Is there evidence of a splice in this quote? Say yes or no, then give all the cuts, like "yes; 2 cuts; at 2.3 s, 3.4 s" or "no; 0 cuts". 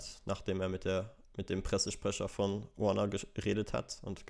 no; 0 cuts